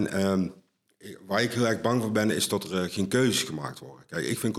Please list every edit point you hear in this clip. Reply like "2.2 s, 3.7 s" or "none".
none